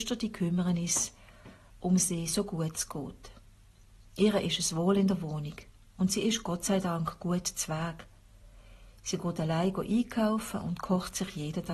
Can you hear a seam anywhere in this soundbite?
no; 0 cuts

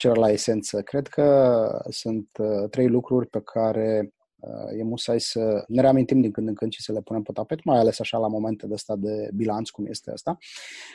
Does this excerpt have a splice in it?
no; 0 cuts

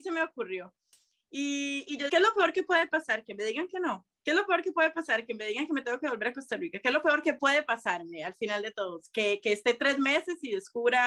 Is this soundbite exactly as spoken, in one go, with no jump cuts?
no; 1 cut; at 2.1 s

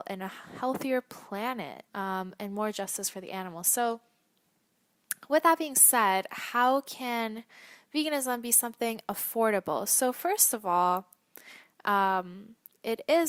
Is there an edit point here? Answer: yes; 1 cut; at 1.9 s

